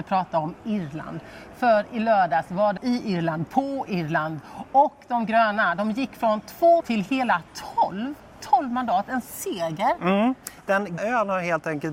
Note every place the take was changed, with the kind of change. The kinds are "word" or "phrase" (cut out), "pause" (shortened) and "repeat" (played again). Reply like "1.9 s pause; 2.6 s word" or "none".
2.8 s word; 6.8 s word; 9.2 s word; 11.0 s word